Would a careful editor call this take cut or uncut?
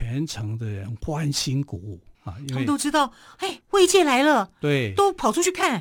cut